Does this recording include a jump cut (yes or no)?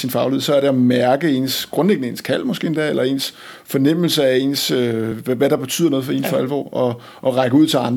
no